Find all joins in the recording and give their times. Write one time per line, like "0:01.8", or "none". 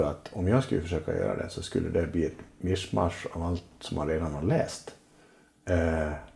none